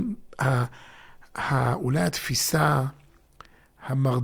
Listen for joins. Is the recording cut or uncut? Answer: uncut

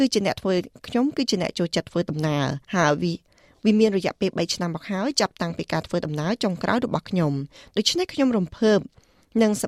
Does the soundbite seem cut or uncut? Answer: cut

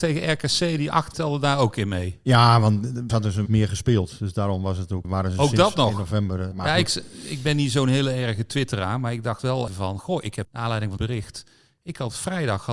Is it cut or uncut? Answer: cut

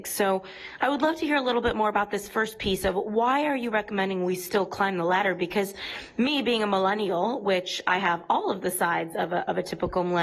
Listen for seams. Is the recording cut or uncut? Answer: uncut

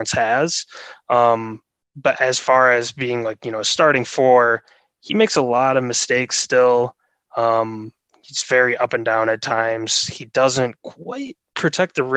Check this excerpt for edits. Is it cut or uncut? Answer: uncut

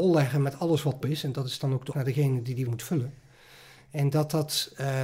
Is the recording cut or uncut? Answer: cut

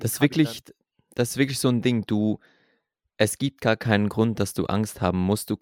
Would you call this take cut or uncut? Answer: uncut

